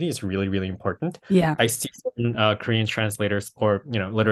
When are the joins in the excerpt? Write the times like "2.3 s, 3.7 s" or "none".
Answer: none